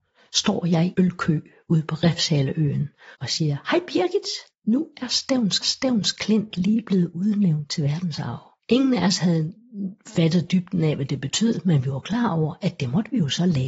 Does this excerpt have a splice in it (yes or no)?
yes